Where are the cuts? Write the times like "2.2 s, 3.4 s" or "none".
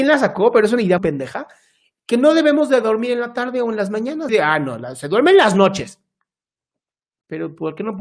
1.0 s, 4.3 s